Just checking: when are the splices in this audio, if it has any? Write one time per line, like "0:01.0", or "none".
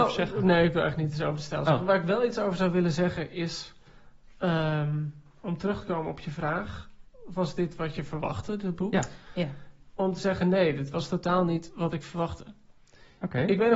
none